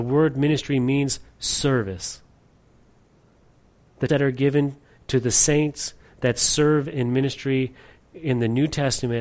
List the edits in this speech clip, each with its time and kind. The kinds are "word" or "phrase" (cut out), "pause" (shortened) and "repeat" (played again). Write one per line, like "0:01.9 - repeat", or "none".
0:04.1 - word